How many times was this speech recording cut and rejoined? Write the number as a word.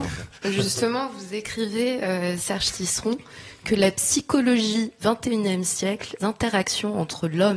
two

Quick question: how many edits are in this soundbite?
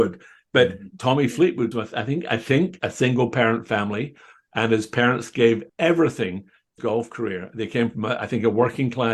four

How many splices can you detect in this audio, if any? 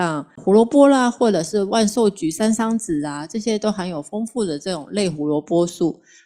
zero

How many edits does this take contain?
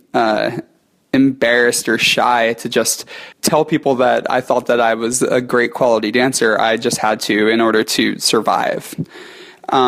one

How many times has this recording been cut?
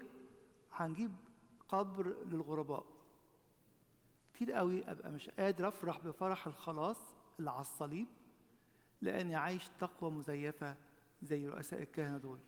zero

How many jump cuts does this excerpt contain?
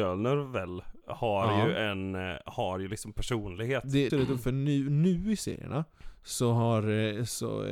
one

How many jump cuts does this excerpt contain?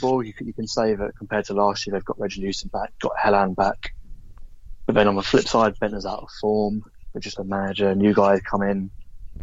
one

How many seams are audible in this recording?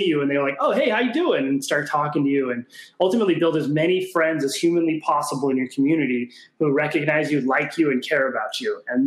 zero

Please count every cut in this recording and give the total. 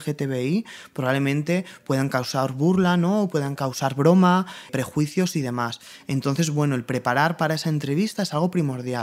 two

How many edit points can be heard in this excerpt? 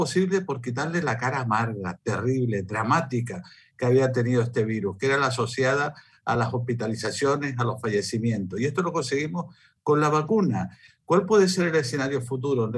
zero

